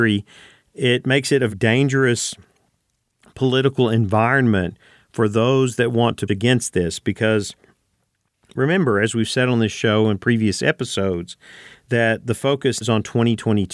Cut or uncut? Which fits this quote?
cut